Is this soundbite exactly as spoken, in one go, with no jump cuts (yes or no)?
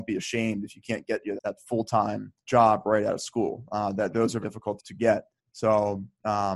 no